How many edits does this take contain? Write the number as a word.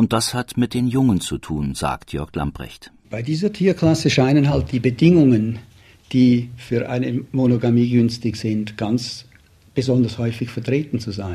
zero